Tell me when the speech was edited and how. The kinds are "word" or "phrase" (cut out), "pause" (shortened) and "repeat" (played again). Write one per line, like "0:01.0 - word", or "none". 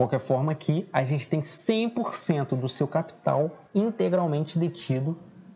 0:03.6 - pause

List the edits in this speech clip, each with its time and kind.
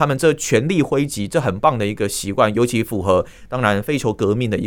none

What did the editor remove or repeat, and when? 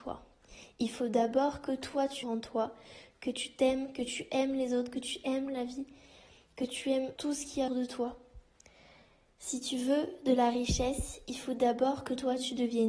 0:02.2 - phrase
0:07.2 - word
0:07.7 - word

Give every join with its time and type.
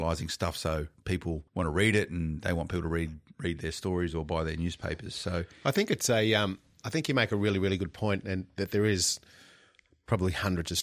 0:01.5 - pause

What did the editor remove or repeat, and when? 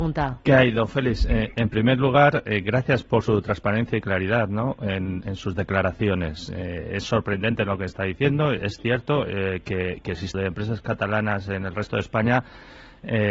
0:10.3 - phrase

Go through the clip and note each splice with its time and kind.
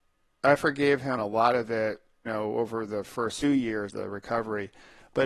0:01.2 - word
0:02.3 - word
0:03.4 - word
0:03.9 - word

